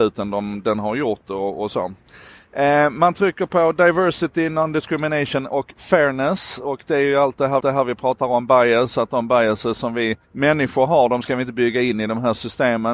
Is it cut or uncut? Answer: cut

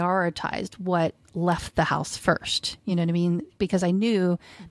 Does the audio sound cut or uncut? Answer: uncut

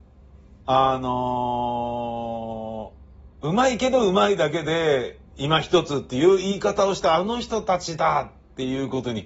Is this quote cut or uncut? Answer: cut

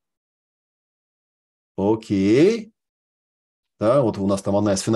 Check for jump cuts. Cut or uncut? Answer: uncut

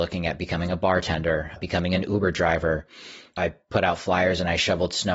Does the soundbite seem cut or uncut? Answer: uncut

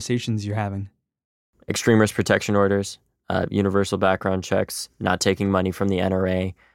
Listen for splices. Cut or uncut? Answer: uncut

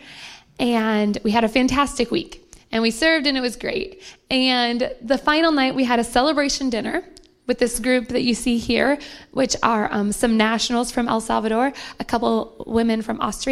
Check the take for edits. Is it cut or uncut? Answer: uncut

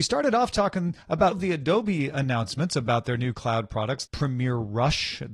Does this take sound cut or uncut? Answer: cut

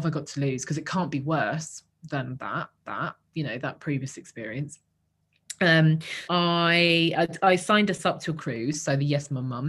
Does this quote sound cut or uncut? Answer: cut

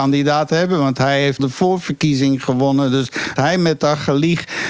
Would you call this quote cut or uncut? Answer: cut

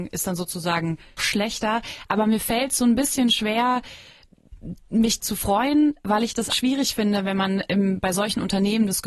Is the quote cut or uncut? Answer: cut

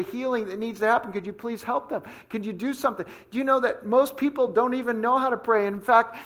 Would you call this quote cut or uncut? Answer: uncut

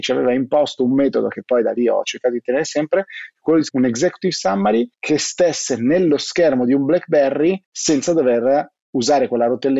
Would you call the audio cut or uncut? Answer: cut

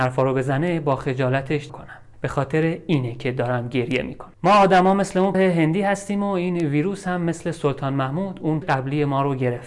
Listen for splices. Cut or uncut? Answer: cut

